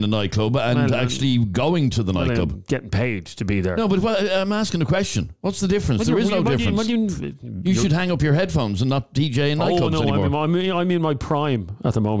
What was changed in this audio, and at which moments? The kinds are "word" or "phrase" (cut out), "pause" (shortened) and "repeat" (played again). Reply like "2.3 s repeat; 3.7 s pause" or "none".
none